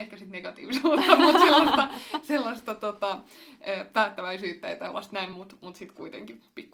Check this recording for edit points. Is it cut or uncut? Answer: uncut